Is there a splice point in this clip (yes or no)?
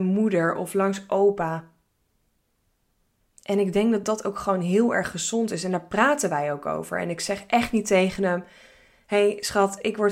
no